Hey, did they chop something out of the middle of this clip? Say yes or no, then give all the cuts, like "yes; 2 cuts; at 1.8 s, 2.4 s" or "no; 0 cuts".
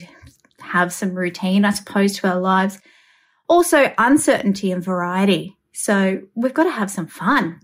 no; 0 cuts